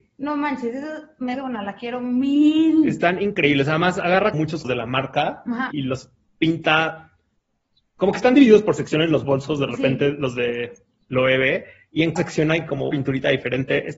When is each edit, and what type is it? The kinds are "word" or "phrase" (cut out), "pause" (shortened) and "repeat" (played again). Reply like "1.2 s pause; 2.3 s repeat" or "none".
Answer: 1.3 s word; 4.3 s word; 4.6 s word; 5.7 s word; 12.2 s word; 12.9 s word